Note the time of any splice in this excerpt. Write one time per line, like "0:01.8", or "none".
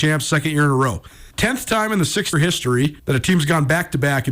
0:01.3
0:02.3
0:03.0